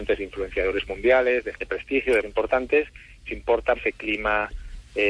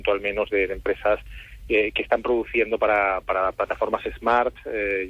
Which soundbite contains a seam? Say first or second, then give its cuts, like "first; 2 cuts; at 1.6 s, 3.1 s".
first; 4 cuts; at 1.5 s, 2.2 s, 3.3 s, 3.7 s